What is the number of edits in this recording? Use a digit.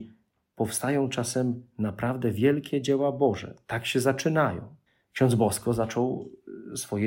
1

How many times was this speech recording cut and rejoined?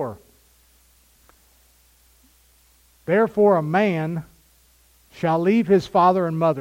0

